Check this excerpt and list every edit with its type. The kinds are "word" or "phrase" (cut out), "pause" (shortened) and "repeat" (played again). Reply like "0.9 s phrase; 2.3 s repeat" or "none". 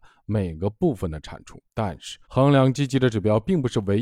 1.7 s pause; 2.2 s pause